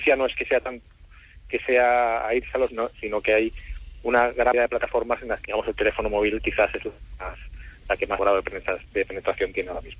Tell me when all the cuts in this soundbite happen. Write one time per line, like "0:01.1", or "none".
0:02.7
0:04.5
0:05.4
0:08.2